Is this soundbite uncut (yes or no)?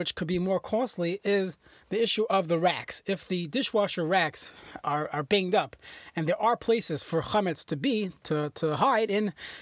yes